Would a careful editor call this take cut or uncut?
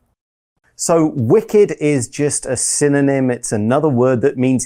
uncut